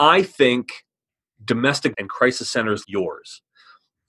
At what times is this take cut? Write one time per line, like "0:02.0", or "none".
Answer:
0:01.9
0:02.8